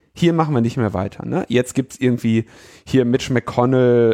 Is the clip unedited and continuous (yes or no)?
yes